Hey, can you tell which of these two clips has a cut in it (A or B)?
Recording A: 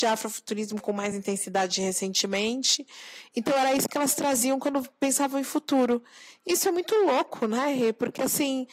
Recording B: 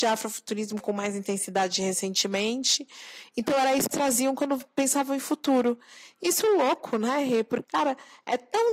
B